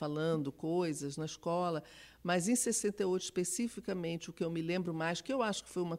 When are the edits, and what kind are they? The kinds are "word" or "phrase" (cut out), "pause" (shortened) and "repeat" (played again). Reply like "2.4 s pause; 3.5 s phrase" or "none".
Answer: none